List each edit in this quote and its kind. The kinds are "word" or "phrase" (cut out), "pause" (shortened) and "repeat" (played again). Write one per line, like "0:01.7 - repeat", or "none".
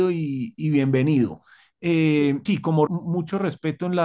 0:02.5 - word
0:02.9 - word